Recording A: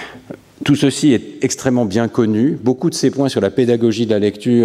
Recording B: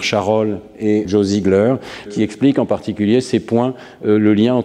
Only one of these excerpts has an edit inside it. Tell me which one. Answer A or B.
B